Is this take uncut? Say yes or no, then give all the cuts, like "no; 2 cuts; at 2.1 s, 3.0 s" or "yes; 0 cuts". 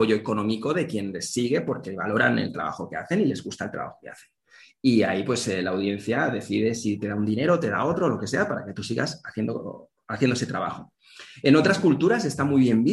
yes; 0 cuts